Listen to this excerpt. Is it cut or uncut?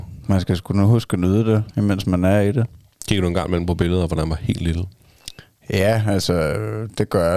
uncut